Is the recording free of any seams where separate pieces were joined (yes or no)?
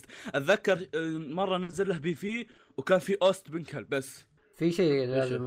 yes